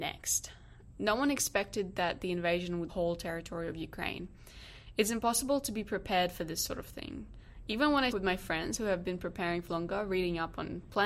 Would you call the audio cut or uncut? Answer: cut